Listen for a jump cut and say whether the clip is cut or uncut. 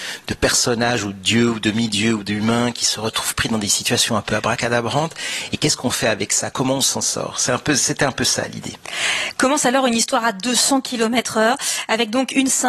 uncut